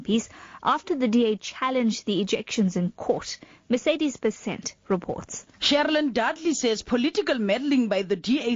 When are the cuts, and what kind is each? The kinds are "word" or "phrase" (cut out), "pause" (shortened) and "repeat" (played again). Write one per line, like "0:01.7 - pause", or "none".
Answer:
none